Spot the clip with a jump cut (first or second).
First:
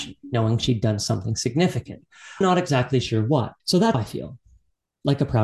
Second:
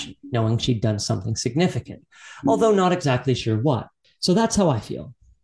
first